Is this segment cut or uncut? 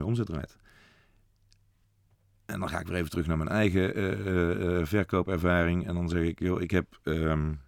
uncut